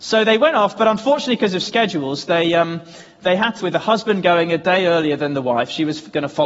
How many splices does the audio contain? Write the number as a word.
one